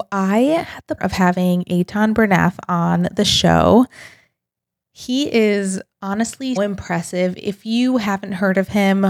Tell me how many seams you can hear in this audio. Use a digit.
2